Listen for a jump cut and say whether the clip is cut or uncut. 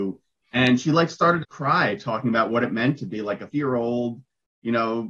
cut